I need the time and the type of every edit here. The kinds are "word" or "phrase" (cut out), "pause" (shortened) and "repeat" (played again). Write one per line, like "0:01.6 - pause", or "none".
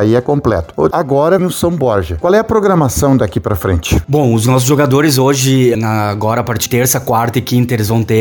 0:00.9 - word
0:01.4 - word
0:05.7 - word
0:06.7 - word